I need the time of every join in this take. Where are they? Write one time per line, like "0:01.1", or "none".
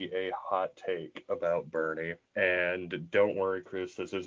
0:02.3